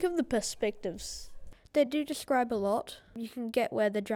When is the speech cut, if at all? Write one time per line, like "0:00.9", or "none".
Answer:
none